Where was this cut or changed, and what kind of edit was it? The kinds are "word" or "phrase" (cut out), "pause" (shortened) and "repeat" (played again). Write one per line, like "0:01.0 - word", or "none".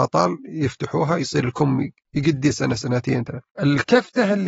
none